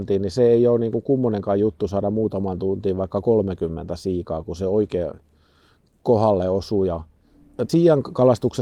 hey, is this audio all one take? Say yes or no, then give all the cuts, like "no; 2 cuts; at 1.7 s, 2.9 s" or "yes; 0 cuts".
no; 1 cut; at 7.7 s